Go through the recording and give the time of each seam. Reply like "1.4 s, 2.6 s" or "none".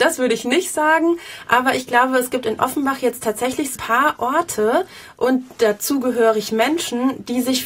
3.8 s